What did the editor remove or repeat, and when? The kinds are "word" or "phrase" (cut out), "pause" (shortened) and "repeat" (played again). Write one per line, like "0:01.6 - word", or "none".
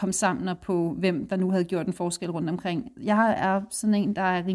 none